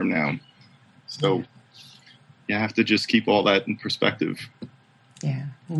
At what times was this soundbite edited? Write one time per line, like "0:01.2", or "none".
none